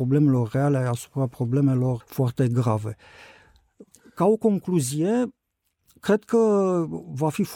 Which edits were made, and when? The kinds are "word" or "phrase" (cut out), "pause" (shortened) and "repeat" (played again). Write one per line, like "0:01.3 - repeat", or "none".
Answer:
0:02.0 - word